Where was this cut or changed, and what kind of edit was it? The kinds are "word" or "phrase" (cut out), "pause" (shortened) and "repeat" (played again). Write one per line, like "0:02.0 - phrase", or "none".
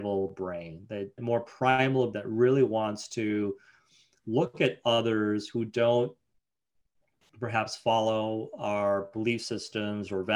0:01.2 - word
0:02.1 - word